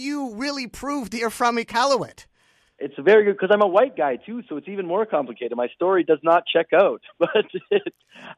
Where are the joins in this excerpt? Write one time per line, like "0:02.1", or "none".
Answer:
none